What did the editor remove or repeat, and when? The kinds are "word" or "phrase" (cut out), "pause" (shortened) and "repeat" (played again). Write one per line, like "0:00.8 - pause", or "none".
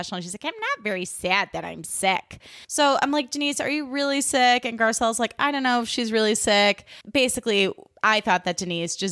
0:02.6 - pause
0:07.0 - pause